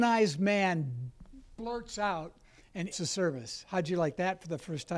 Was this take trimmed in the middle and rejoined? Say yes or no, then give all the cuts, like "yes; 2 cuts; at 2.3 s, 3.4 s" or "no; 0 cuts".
yes; 1 cut; at 2.9 s